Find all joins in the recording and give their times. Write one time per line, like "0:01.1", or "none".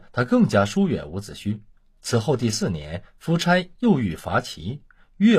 none